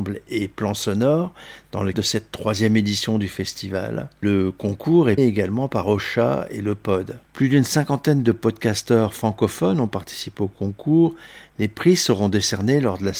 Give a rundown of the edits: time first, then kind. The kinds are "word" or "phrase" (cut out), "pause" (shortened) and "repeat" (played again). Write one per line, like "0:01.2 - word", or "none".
0:01.9 - word
0:05.2 - word
0:07.2 - pause